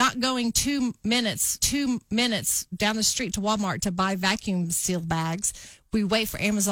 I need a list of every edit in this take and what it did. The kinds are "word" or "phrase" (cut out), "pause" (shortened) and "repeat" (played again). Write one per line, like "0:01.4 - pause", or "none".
0:01.6 - repeat